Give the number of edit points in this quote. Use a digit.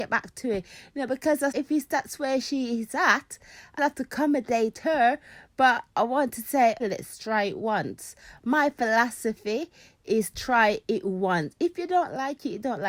3